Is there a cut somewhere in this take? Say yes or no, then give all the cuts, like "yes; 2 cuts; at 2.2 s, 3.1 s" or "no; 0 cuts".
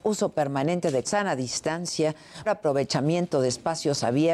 yes; 2 cuts; at 1.0 s, 2.4 s